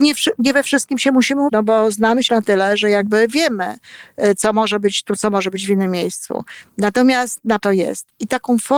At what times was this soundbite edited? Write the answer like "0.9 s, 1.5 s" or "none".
1.5 s, 2.3 s, 7.6 s